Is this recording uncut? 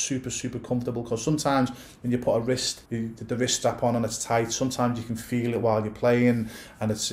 no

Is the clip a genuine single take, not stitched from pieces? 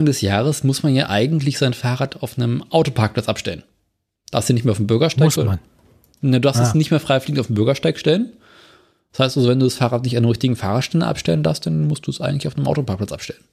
yes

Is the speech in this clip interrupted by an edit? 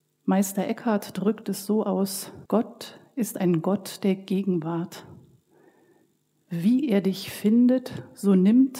yes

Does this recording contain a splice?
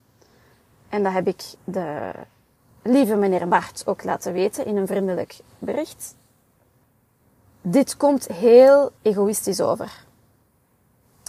yes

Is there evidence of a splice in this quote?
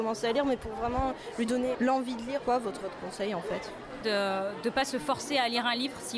yes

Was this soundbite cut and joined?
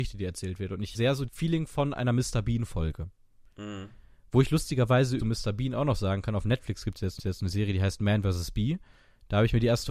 yes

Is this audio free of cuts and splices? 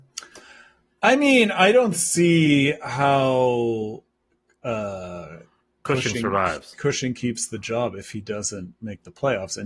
yes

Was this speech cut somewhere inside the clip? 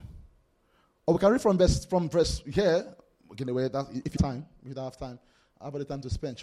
yes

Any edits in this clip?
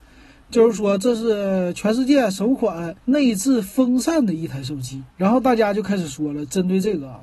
yes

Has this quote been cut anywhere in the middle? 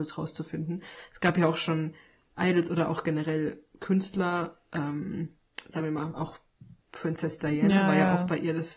no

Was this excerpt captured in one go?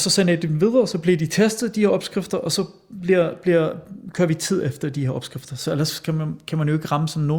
yes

